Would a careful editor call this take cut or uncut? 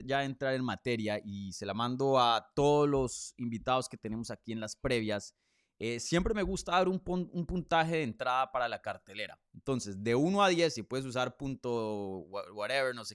uncut